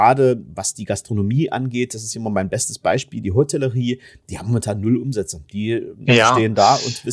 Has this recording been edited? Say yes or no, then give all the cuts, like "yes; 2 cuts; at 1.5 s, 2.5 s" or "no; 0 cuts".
no; 0 cuts